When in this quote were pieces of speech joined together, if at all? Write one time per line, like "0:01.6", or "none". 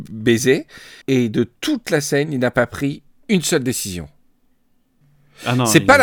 0:01.0